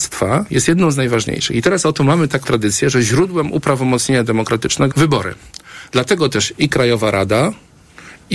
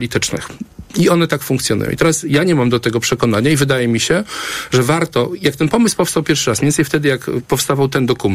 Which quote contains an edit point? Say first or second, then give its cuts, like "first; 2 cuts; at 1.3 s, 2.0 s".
first; 2 cuts; at 2.4 s, 4.9 s